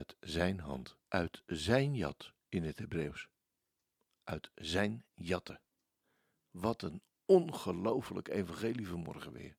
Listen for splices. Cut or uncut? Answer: cut